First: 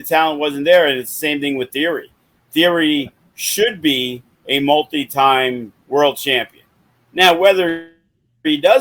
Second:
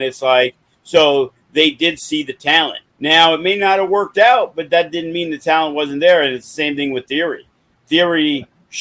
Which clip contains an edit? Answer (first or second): second